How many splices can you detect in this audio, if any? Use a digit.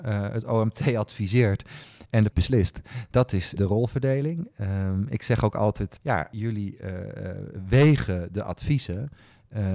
4